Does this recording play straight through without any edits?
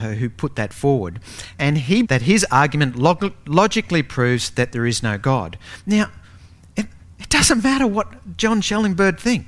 no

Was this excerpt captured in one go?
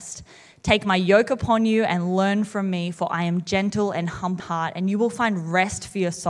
no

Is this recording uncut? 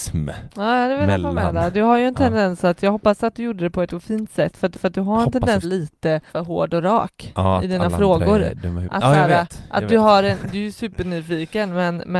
no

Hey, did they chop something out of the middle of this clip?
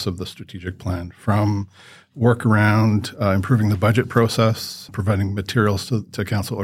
yes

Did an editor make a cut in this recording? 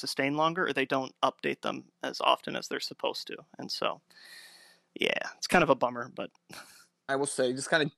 no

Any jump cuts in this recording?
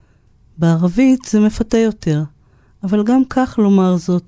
no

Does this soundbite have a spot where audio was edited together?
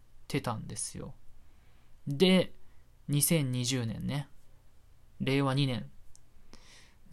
no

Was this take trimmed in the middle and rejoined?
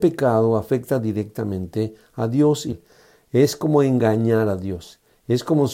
yes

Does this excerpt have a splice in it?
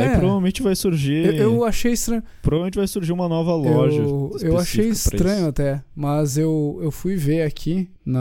no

